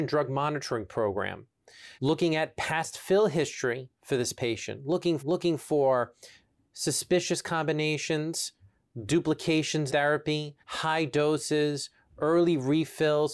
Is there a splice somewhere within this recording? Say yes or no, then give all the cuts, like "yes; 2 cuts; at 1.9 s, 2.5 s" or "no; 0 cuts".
yes; 4 cuts; at 2.0 s, 5.2 s, 9.9 s, 10.6 s